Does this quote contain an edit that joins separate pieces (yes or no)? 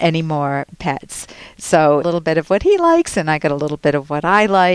yes